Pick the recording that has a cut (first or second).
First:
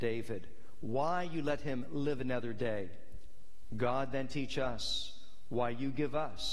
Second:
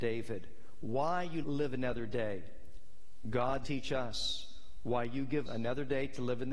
second